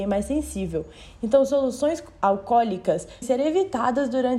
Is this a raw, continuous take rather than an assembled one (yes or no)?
no